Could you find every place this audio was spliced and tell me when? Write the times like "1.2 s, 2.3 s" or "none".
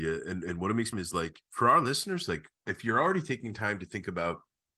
0.9 s, 1.4 s

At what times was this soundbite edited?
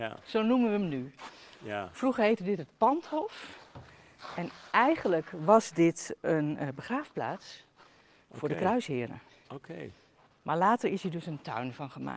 none

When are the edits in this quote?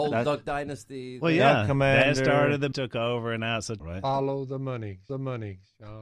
2.7 s, 3.8 s, 5.1 s

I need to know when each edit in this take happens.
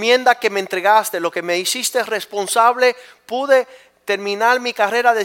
none

